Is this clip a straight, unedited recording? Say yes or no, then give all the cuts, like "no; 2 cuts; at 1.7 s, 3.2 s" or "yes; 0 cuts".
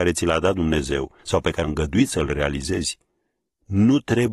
no; 2 cuts; at 1.2 s, 1.6 s